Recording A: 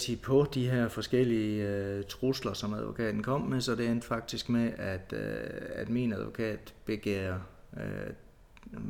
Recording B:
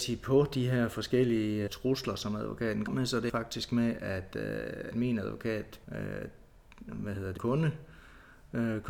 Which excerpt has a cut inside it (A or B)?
B